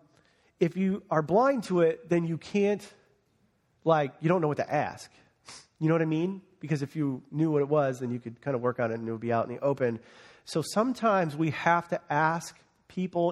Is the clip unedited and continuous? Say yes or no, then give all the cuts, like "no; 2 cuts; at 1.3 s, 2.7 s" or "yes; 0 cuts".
yes; 0 cuts